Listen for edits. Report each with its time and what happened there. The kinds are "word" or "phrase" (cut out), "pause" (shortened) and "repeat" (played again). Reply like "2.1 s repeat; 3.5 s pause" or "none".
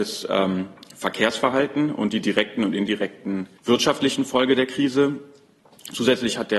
3.6 s pause